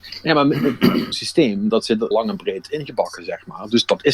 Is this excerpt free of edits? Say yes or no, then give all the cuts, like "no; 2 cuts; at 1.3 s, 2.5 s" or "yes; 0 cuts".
no; 3 cuts; at 1.1 s, 1.7 s, 2.1 s